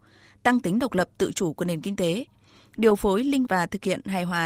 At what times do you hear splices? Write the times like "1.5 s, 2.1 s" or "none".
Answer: 3.5 s